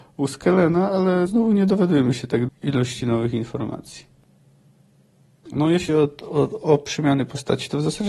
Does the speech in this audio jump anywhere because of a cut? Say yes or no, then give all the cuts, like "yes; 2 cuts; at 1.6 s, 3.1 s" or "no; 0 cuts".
yes; 3 cuts; at 1.3 s, 2.5 s, 5.9 s